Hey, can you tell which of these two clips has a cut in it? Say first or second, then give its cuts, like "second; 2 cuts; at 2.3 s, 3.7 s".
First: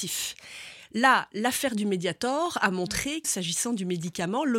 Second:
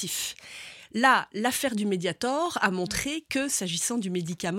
first; 1 cut; at 3.2 s